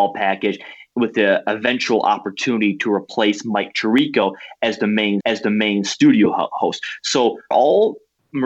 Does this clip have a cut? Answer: yes; 2 cuts; at 5.2 s, 7.5 s

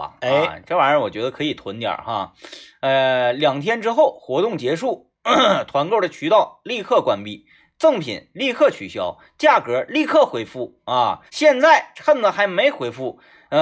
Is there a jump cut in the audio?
yes; 1 cut; at 11.3 s

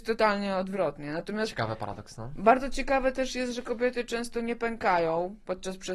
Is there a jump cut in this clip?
no; 0 cuts

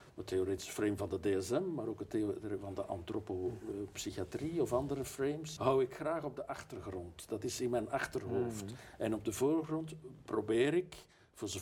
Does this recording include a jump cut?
yes; 1 cut; at 5.6 s

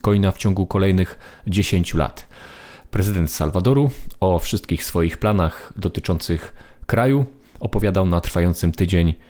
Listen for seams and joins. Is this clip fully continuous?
yes; 0 cuts

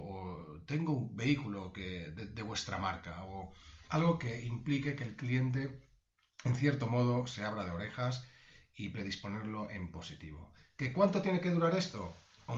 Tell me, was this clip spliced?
no; 0 cuts

